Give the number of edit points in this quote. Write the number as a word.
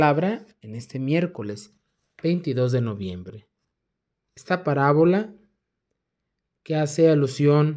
one